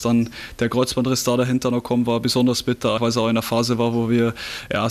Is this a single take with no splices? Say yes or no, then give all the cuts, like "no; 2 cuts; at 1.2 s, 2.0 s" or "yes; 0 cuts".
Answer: no; 1 cut; at 3.0 s